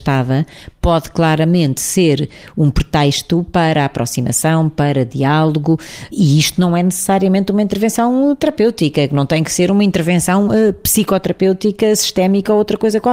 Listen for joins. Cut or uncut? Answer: uncut